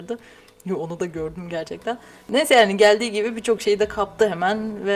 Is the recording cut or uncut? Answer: uncut